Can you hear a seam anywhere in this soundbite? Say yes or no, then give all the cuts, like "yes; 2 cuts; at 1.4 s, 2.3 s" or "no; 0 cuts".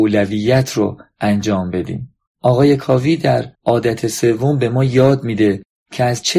yes; 1 cut; at 3.5 s